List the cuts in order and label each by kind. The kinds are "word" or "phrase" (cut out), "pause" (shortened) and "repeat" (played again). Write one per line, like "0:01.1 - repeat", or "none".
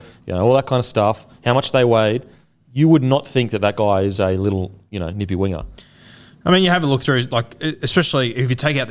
none